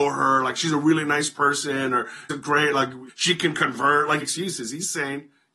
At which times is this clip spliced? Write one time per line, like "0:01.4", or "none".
0:02.3
0:03.1
0:04.2